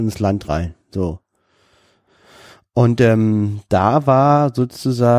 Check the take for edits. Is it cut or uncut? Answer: uncut